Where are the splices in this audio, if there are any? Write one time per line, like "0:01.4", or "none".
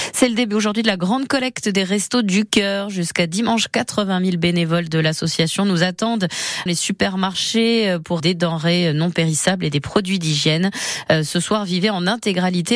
0:06.7
0:08.2